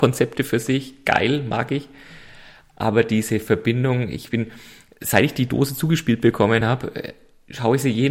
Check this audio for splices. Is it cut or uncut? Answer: uncut